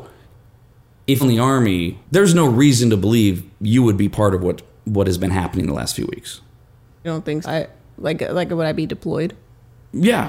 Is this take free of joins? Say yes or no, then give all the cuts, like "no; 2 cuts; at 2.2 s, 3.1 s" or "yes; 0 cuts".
no; 4 cuts; at 1.2 s, 2.0 s, 7.0 s, 7.4 s